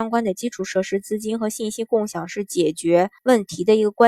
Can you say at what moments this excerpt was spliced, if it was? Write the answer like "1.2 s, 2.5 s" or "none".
3.2 s